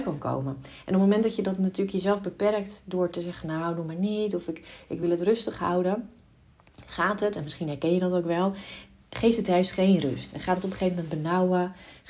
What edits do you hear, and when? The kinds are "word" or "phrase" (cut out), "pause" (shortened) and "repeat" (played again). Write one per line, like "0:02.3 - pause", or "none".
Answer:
none